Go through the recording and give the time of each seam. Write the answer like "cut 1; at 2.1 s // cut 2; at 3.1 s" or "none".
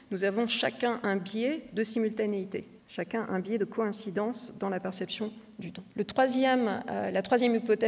cut 1; at 2.8 s // cut 2; at 5.9 s